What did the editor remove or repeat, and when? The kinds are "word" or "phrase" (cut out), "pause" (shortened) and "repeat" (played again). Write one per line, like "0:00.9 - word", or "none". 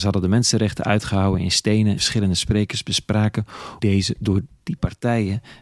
0:02.0 - word
0:03.8 - word